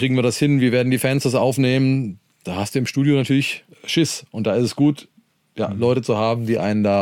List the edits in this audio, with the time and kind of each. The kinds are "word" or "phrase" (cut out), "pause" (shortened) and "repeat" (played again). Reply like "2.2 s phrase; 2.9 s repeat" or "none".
none

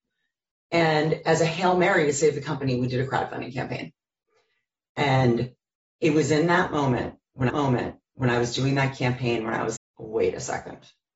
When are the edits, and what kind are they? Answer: 7.5 s repeat; 9.8 s word

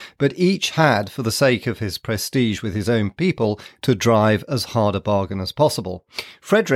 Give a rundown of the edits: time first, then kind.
none

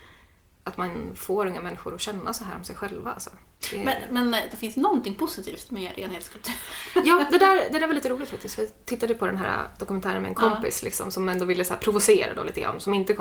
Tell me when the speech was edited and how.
4.5 s phrase

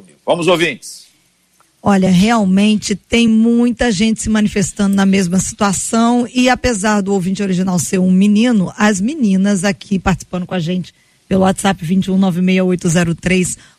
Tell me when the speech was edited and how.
none

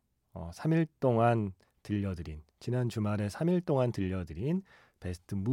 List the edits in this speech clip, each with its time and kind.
none

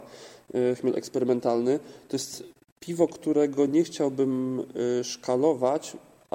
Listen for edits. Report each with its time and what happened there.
none

